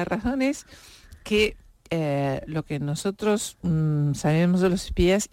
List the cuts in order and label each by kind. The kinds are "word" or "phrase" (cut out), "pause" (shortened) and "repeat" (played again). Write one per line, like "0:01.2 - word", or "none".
none